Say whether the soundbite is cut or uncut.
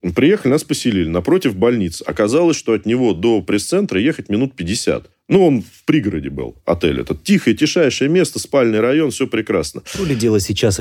uncut